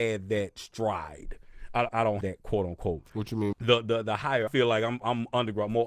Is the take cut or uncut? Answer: cut